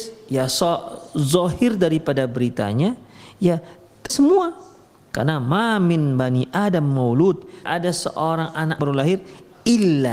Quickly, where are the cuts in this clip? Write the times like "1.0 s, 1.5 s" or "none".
4.1 s, 7.7 s, 8.8 s